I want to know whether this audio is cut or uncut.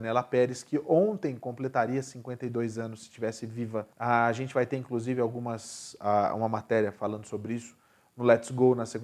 cut